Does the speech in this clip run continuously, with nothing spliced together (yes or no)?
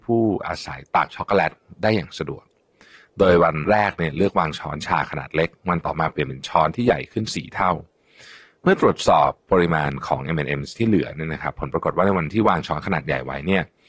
yes